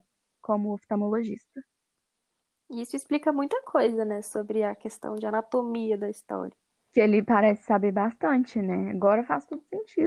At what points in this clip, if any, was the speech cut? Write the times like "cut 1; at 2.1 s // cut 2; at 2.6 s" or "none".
none